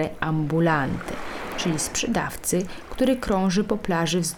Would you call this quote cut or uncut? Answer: uncut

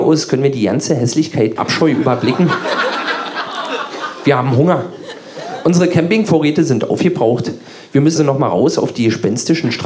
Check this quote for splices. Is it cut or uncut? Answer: cut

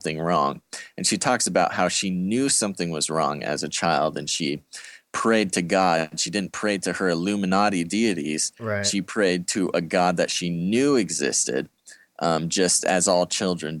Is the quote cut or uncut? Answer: uncut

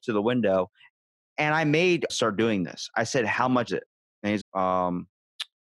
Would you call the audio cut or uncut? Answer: cut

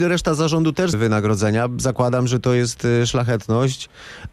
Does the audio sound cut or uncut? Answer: cut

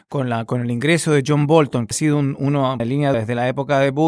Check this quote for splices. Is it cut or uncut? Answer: cut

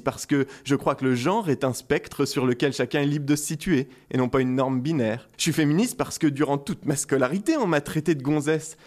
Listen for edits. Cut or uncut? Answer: cut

